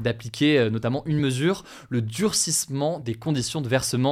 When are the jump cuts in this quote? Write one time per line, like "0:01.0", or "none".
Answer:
none